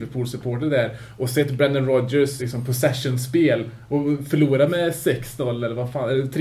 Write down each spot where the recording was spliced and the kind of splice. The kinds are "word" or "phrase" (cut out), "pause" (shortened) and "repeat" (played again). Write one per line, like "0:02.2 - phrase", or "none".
0:02.4 - word